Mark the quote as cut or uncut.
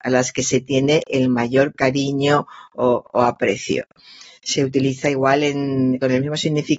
uncut